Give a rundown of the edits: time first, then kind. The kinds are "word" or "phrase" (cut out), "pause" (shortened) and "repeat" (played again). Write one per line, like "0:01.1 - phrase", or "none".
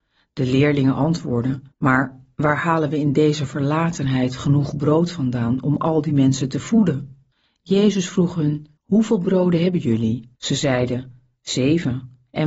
0:01.7 - pause
0:07.3 - pause
0:08.8 - pause
0:10.4 - pause

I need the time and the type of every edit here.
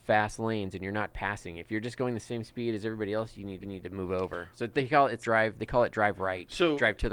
0:03.6 - repeat
0:05.2 - word

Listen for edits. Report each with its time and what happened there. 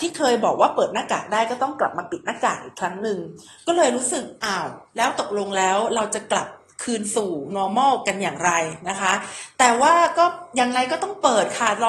0:04.4 - pause
0:04.9 - pause
0:07.5 - word

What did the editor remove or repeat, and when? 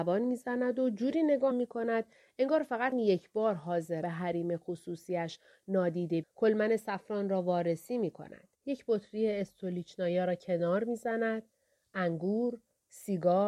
0:01.5 - word
0:02.9 - word
0:04.0 - phrase
0:06.2 - phrase
0:08.5 - pause

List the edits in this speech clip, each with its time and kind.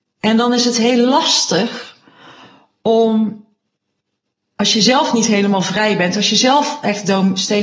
none

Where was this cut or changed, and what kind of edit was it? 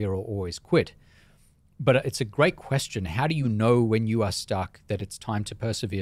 none

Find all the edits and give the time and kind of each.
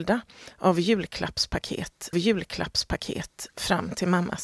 0:02.1 - repeat

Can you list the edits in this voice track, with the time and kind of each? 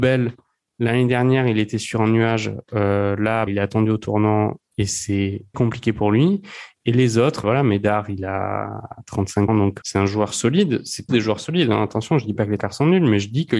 0:03.5 - word
0:05.5 - word
0:07.4 - word
0:09.5 - word
0:09.8 - word
0:11.1 - word
0:12.6 - word

